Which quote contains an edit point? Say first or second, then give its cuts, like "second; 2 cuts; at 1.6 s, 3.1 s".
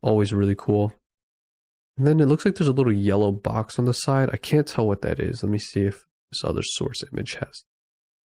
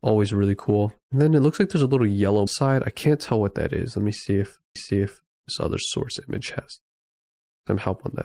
second; 3 cuts; at 1.0 s, 2.5 s, 4.8 s